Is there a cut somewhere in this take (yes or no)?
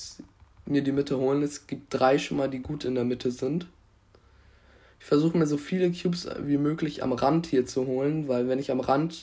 no